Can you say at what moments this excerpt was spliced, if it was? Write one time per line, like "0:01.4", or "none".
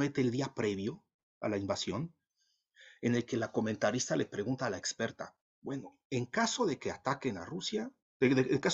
none